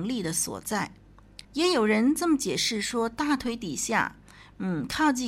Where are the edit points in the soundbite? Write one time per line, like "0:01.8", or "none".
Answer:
0:01.4